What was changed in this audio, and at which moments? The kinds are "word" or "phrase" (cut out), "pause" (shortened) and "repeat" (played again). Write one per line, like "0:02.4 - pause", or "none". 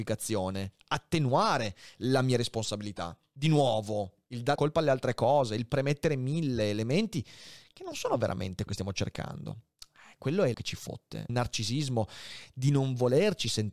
0:04.6 - word
0:08.7 - word
0:10.5 - word
0:11.3 - word